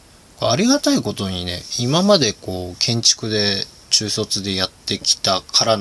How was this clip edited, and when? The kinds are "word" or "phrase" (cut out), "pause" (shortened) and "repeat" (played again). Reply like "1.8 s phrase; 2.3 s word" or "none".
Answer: 4.8 s pause